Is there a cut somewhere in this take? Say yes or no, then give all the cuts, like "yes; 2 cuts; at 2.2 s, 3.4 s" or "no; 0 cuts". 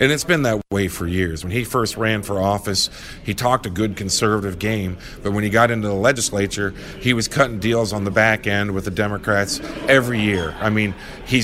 no; 0 cuts